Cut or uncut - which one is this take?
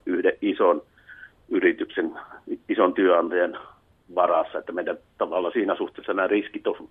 uncut